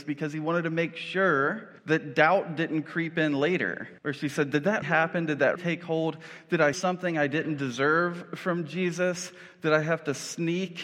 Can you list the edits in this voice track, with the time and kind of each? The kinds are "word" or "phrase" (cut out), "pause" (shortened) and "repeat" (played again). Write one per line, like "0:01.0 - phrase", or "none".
0:01.8 - pause
0:04.0 - pause
0:04.8 - word
0:05.6 - word
0:06.7 - word